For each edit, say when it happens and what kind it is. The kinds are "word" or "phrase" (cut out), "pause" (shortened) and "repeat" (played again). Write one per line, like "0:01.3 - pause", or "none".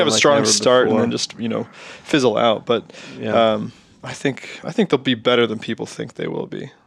none